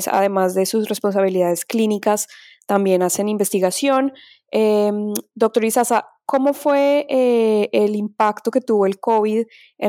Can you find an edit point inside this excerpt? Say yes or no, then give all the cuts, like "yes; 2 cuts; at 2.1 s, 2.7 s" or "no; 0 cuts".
no; 0 cuts